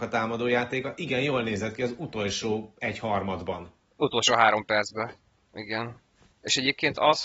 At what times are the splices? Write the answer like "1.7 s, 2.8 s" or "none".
none